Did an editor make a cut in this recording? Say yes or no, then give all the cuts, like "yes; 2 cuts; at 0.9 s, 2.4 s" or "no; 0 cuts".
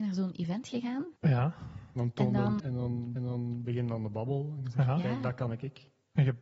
yes; 3 cuts; at 1.2 s, 2.6 s, 3.2 s